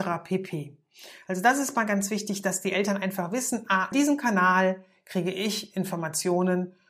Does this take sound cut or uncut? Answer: cut